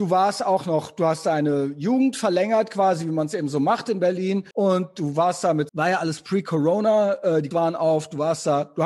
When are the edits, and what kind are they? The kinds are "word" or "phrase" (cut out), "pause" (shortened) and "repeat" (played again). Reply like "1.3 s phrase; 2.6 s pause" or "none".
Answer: 4.5 s pause; 5.7 s word; 7.5 s word